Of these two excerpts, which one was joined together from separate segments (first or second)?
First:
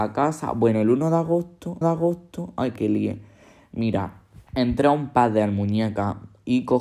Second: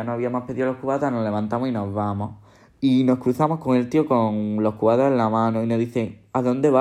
first